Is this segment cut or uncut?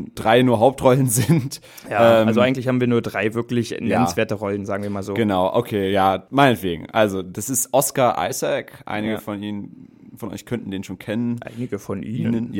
uncut